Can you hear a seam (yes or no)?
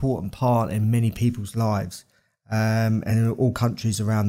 no